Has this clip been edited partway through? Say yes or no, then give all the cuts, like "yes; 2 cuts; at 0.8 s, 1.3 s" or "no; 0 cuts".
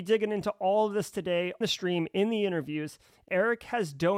yes; 2 cuts; at 1.6 s, 3.3 s